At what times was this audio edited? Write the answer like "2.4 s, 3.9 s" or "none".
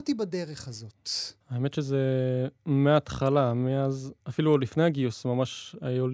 1.4 s, 4.2 s